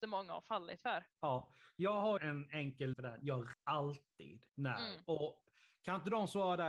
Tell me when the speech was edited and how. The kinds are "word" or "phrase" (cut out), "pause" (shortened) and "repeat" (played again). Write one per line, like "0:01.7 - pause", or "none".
0:01.1 - pause
0:02.2 - phrase
0:02.9 - word
0:03.5 - word
0:04.5 - pause